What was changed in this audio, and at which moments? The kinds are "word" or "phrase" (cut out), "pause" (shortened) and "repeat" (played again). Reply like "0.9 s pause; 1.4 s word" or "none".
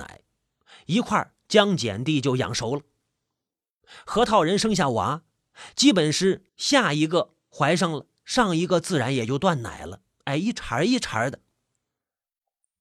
6.5 s pause; 7.4 s pause